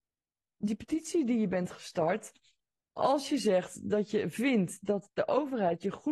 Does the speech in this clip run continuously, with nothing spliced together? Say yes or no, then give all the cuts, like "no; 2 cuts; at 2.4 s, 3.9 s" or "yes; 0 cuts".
yes; 0 cuts